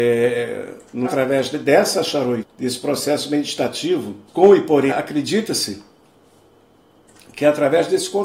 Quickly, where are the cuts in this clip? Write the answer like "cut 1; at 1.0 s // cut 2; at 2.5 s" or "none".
cut 1; at 1.0 s // cut 2; at 2.4 s // cut 3; at 4.3 s // cut 4; at 4.9 s